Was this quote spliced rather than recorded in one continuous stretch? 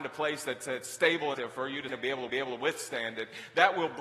yes; 3 cuts; at 1.3 s, 1.9 s, 2.3 s

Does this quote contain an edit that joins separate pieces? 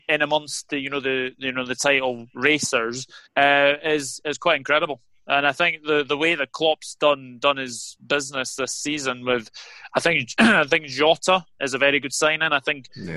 yes; 1 cut; at 3.3 s

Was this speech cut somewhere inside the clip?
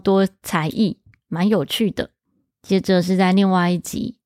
no; 0 cuts

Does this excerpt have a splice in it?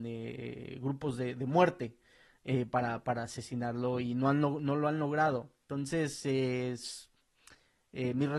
no; 0 cuts

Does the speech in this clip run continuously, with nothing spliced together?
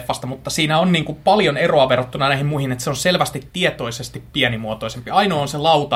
yes; 0 cuts

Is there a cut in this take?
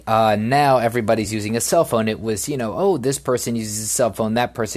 no; 0 cuts

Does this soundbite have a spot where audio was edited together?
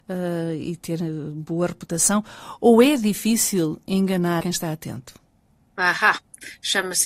no; 0 cuts

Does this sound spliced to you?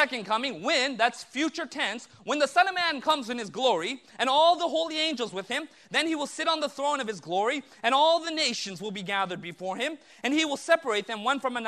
no; 0 cuts

